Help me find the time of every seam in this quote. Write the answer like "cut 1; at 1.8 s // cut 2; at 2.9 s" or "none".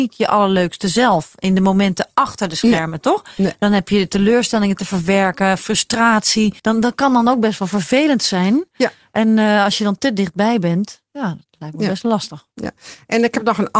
cut 1; at 6.6 s // cut 2; at 12.5 s

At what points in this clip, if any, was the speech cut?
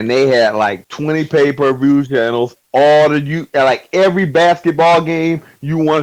cut 1; at 2.6 s

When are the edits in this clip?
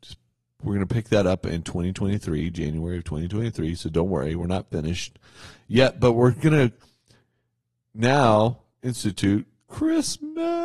none

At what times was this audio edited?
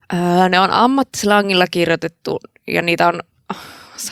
none

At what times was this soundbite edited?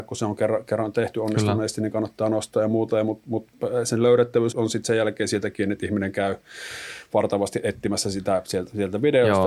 cut 1; at 4.5 s

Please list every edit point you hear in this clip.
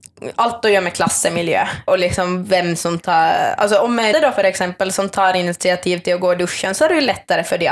cut 1; at 1.9 s // cut 2; at 4.1 s

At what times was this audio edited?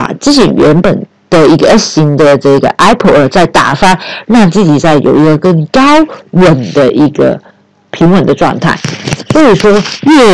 none

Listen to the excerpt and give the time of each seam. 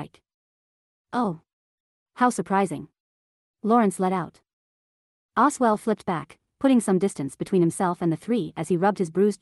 none

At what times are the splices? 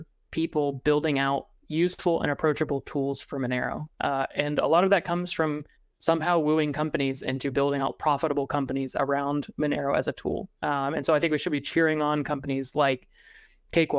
cut 1; at 1.6 s // cut 2; at 5.7 s // cut 3; at 7.8 s

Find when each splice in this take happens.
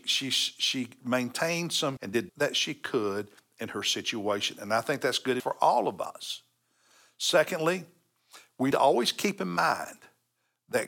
cut 1; at 2.0 s // cut 2; at 2.3 s // cut 3; at 5.4 s // cut 4; at 8.7 s

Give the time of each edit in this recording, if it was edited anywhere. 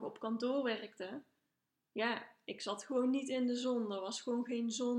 none

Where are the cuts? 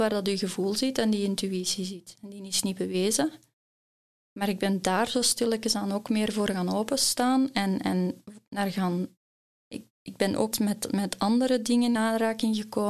cut 1; at 10.5 s // cut 2; at 12.0 s

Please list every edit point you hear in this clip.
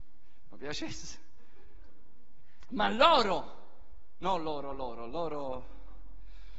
none

